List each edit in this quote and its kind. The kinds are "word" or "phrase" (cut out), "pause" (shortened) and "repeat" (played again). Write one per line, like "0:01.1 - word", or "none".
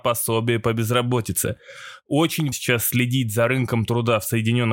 0:02.5 - word